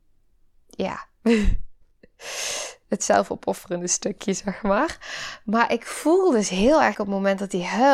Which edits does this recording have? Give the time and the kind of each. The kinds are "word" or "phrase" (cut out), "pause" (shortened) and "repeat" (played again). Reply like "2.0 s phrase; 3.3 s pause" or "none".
1.8 s pause; 6.9 s word